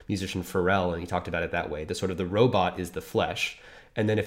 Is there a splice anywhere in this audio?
no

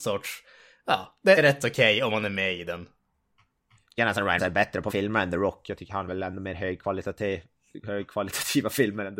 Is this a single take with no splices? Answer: no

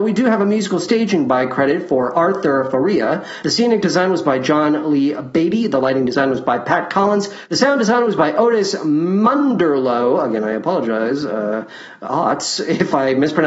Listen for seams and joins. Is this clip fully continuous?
yes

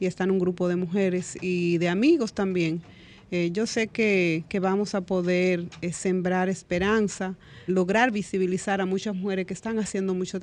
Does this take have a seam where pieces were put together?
yes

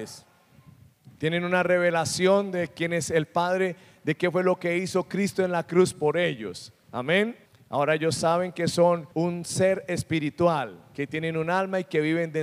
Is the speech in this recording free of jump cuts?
no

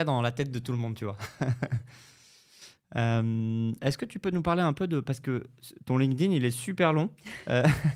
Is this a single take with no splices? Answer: yes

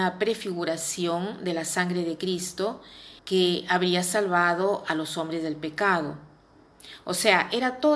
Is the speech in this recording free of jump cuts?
no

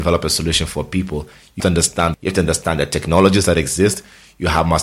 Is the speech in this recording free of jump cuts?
no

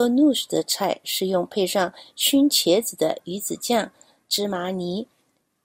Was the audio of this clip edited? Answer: no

